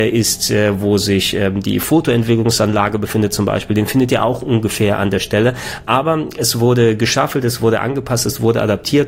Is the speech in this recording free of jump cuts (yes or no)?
yes